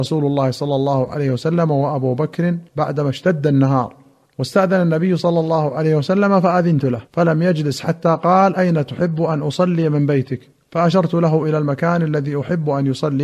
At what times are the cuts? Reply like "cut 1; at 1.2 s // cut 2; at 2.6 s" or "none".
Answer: cut 1; at 2.7 s // cut 2; at 4.3 s // cut 3; at 7.1 s // cut 4; at 10.5 s